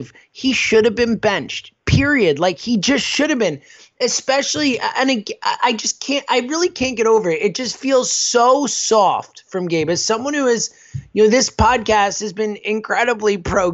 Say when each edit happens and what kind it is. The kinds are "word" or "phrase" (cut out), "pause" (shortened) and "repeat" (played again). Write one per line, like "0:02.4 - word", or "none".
none